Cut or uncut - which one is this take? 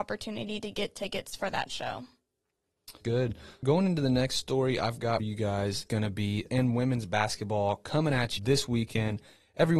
cut